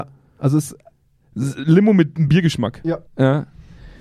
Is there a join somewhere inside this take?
yes; 2 cuts; at 2.3 s, 3.1 s

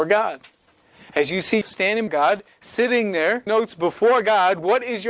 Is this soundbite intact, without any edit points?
no; 3 cuts; at 1.6 s, 2.1 s, 3.5 s

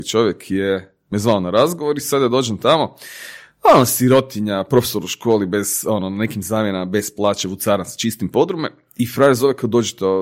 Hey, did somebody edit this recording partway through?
no; 0 cuts

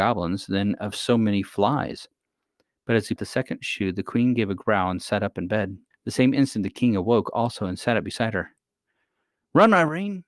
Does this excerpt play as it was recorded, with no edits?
no; 2 cuts; at 3.2 s, 5.9 s

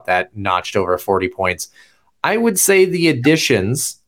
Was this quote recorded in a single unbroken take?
yes; 0 cuts

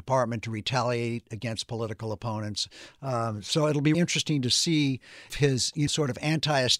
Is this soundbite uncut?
no; 3 cuts; at 3.9 s, 5.3 s, 5.9 s

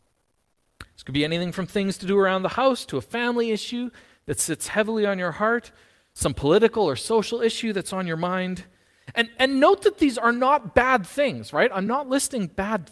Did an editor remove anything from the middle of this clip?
no; 0 cuts

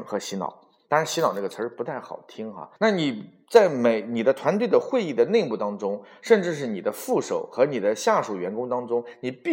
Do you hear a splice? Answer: yes; 1 cut; at 2.8 s

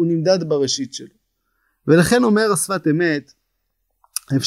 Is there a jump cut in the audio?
no; 0 cuts

